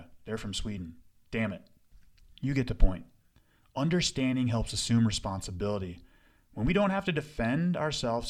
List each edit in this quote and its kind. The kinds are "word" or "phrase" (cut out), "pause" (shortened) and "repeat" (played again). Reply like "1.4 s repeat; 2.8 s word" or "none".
none